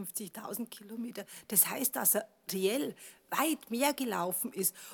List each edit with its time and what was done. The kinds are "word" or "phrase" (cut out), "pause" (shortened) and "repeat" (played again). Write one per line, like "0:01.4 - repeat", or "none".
none

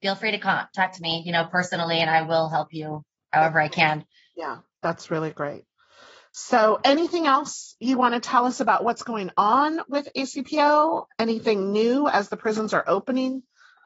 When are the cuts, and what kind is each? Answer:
none

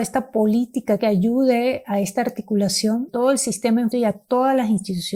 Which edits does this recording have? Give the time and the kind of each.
0:01.0 - word
0:03.1 - word
0:03.9 - word

